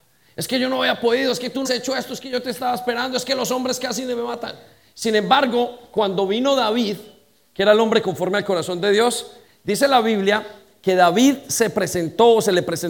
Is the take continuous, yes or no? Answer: no